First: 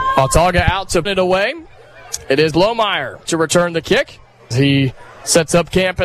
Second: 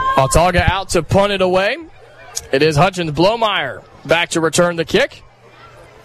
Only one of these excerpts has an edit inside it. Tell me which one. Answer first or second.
first